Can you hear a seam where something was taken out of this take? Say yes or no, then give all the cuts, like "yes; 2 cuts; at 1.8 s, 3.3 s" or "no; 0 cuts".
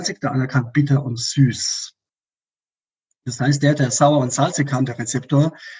no; 0 cuts